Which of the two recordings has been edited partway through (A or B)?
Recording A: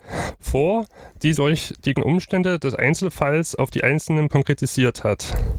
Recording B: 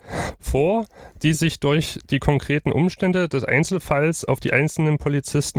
A